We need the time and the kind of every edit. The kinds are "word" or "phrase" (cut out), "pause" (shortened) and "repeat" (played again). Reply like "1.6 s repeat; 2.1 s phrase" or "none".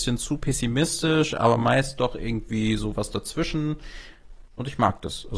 none